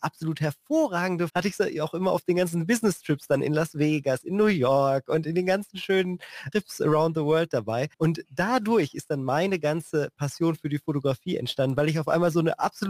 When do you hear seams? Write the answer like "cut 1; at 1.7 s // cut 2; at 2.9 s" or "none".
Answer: cut 1; at 1.3 s // cut 2; at 6.5 s // cut 3; at 7.9 s